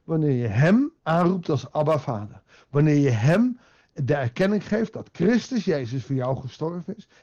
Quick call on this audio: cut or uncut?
cut